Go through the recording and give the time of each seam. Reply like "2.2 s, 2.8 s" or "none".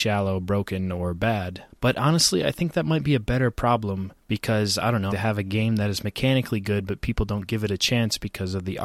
4.2 s, 5.1 s